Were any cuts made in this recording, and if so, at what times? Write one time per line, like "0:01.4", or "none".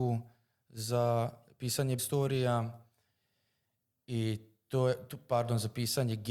0:02.0